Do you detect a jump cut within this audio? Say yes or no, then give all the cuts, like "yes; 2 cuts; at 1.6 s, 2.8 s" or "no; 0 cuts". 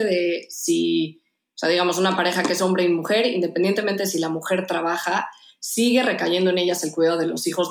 no; 0 cuts